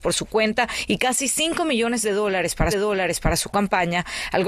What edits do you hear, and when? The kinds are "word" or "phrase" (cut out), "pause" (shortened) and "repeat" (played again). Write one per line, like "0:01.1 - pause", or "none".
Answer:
0:02.7 - repeat